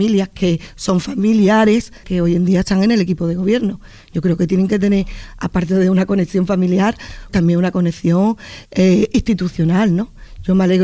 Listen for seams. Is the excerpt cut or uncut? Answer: cut